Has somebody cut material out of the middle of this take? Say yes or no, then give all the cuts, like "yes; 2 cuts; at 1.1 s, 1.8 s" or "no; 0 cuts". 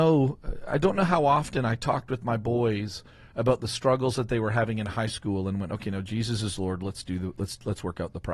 no; 0 cuts